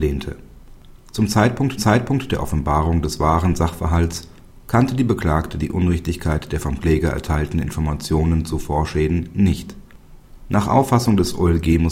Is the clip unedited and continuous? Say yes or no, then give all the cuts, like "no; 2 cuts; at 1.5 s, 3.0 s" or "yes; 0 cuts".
no; 1 cut; at 1.8 s